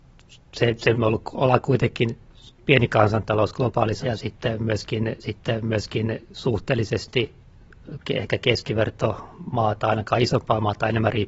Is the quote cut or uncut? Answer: cut